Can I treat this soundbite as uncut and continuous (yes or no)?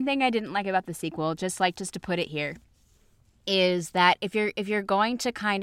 yes